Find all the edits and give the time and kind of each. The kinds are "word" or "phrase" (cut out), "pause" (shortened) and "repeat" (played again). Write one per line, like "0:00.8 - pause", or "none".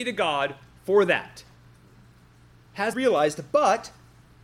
0:02.9 - phrase